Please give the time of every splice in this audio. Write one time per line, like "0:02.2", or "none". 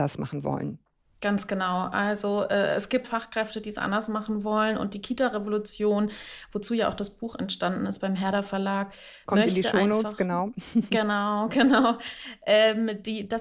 0:03.0